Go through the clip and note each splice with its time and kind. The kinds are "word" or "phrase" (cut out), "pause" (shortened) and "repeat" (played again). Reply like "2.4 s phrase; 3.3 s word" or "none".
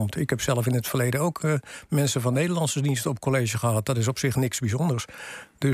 none